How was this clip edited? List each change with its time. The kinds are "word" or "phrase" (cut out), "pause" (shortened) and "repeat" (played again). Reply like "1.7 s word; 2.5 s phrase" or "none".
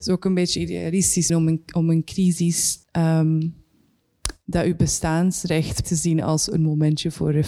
1.3 s word; 2.8 s pause; 5.8 s word